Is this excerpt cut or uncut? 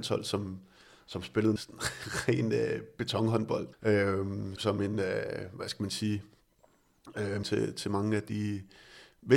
cut